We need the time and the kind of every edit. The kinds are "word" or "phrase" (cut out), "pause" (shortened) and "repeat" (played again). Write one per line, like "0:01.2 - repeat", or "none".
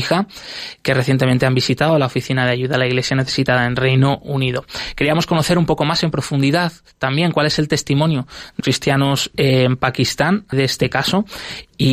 0:08.6 - word
0:10.5 - word

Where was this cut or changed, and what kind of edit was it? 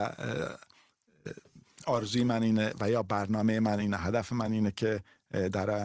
none

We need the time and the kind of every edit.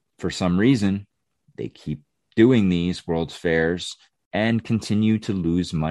none

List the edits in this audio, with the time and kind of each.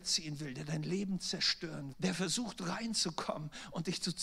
0:01.9 - word

